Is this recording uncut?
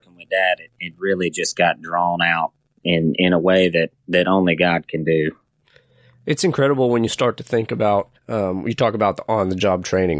no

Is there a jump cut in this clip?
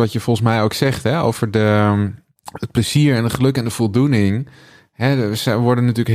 yes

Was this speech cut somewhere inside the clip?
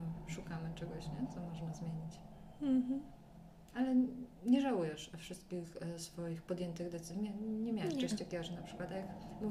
yes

